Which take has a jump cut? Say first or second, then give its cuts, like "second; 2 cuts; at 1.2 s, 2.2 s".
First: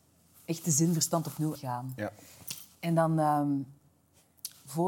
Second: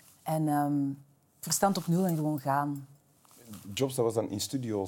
first; 1 cut; at 1.6 s